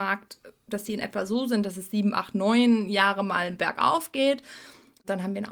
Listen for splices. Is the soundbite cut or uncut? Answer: uncut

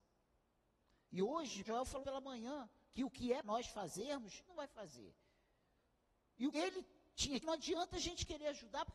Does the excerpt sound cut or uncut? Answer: cut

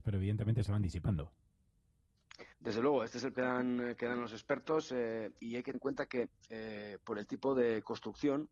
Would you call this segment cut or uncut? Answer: cut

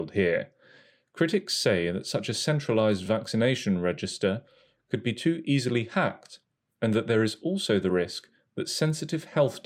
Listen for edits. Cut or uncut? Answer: uncut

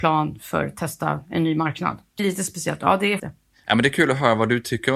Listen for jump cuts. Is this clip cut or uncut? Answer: cut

